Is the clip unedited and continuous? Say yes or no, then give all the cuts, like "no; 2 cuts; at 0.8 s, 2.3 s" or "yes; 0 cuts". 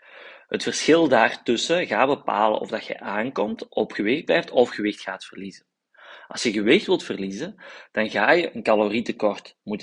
yes; 0 cuts